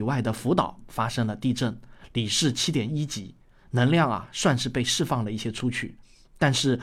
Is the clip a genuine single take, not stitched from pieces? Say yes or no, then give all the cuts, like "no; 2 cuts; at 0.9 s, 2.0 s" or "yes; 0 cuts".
yes; 0 cuts